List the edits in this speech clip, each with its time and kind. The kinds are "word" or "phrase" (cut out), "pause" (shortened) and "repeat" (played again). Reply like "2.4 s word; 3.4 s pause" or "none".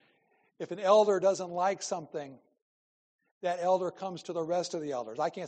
none

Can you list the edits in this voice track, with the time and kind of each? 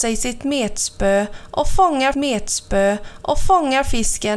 2.1 s repeat

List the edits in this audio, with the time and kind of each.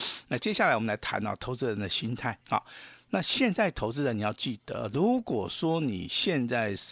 2.4 s pause

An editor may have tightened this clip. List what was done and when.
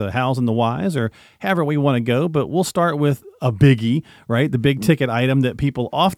none

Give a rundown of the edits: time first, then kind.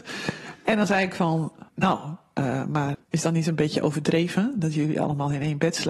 1.7 s pause; 2.9 s word

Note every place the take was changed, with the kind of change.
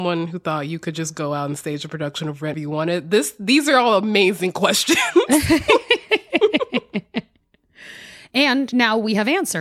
2.5 s word

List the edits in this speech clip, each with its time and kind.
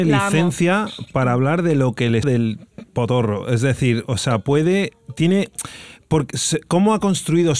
2.2 s word

